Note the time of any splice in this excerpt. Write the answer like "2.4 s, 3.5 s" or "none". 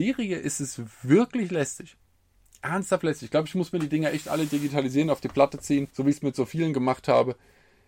5.9 s